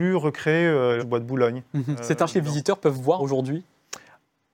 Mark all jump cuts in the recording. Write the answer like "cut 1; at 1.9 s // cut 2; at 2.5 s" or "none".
cut 1; at 1.0 s // cut 2; at 2.3 s // cut 3; at 3.2 s